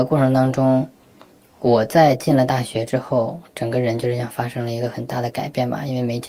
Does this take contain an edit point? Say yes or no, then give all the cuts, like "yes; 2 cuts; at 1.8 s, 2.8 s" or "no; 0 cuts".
no; 0 cuts